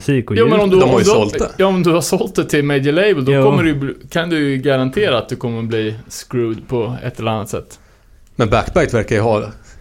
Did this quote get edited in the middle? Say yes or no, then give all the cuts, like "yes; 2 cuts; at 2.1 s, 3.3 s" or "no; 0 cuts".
no; 0 cuts